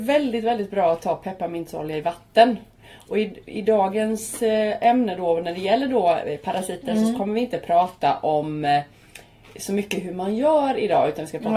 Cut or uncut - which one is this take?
uncut